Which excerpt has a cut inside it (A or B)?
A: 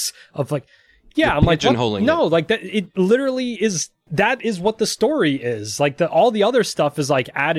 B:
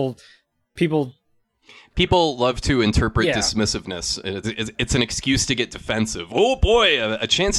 B